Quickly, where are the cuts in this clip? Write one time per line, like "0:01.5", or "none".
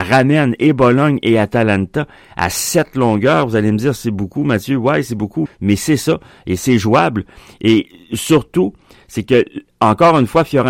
0:05.5